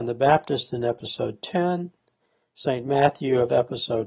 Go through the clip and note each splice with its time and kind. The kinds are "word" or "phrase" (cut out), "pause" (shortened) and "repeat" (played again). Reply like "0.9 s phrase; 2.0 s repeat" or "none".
none